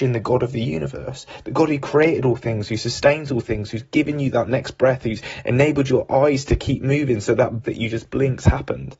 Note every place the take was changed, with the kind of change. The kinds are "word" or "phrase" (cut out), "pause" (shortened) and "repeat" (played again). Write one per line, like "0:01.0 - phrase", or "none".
0:07.6 - word